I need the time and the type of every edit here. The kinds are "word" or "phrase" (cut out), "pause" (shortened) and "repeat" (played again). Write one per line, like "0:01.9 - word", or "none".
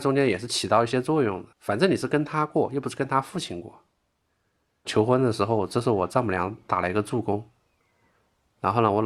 0:01.5 - pause